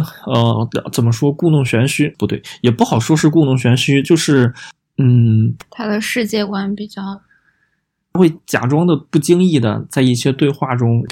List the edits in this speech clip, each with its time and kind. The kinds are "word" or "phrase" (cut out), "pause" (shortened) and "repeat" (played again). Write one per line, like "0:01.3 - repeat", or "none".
none